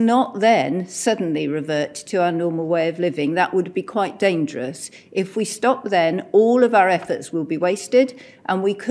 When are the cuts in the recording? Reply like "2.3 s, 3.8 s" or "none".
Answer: none